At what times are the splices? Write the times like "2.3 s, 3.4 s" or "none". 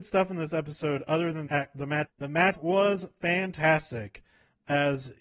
1.5 s, 2.1 s, 2.5 s

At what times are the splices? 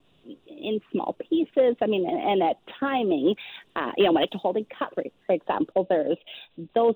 4.3 s

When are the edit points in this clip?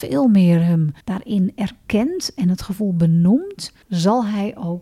1.0 s, 3.8 s

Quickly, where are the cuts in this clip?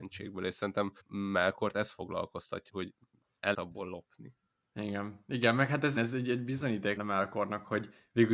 1.0 s, 2.7 s, 3.5 s, 4.5 s, 6.0 s, 7.0 s

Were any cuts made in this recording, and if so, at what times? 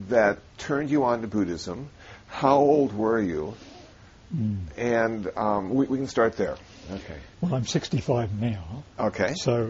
7.3 s

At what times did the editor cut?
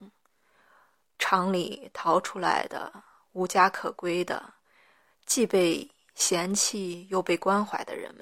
none

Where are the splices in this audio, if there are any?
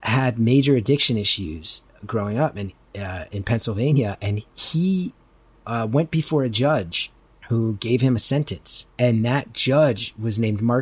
4.5 s, 7.3 s, 8.9 s

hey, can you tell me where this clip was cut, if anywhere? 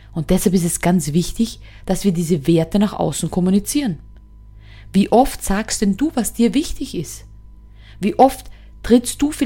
none

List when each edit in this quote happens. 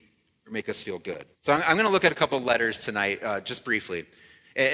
1.4 s

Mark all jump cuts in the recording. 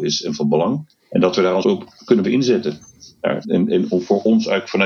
1.0 s, 1.6 s, 2.2 s, 3.4 s

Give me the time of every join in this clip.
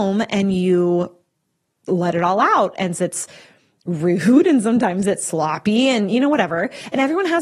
3.0 s

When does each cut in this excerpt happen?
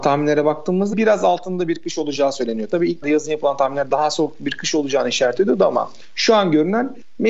0.9 s, 3.0 s

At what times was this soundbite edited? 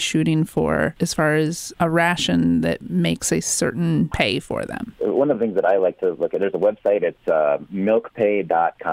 none

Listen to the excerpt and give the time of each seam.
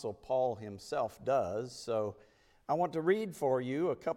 none

